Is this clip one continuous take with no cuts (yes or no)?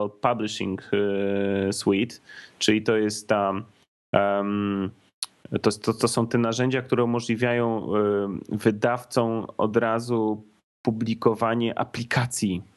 yes